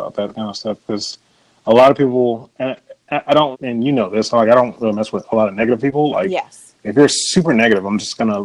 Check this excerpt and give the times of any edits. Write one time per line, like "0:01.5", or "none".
0:03.5